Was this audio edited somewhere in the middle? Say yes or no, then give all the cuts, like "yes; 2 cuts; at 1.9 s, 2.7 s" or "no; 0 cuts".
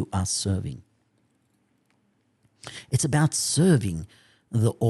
no; 0 cuts